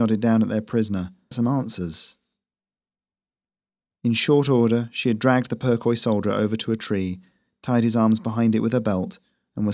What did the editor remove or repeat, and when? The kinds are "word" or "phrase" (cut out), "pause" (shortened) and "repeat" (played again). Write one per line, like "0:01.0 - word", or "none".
0:01.3 - phrase